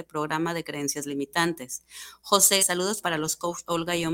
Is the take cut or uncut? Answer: cut